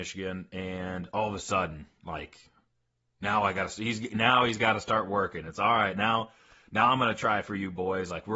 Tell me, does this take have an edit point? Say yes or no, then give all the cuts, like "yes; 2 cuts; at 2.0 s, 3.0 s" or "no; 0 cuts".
no; 0 cuts